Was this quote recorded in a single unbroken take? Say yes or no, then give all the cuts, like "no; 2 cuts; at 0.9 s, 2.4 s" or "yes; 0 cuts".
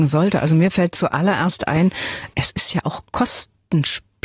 no; 1 cut; at 2.3 s